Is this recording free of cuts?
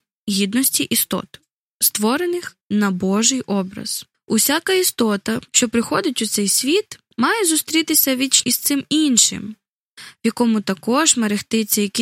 no; 4 cuts; at 2.6 s, 4.1 s, 5.5 s, 8.4 s

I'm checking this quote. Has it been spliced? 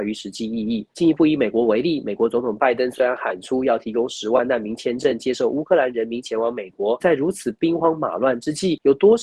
yes; 1 cut; at 7.0 s

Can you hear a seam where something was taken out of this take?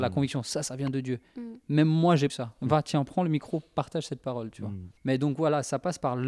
yes; 2 cuts; at 2.3 s, 5.0 s

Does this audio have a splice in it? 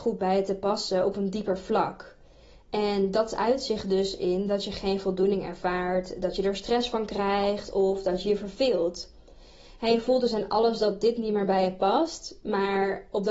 no; 0 cuts

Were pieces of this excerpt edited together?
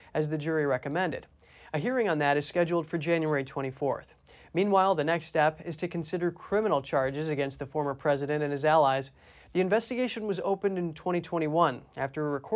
no; 0 cuts

